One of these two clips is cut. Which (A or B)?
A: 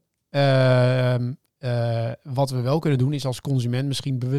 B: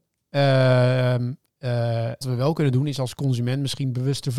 B